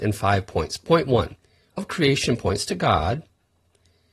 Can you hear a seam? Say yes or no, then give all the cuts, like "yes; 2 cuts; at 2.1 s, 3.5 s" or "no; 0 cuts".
yes; 1 cut; at 1.8 s